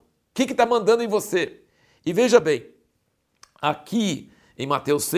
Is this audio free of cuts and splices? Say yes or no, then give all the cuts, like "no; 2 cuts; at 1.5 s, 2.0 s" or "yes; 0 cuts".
yes; 0 cuts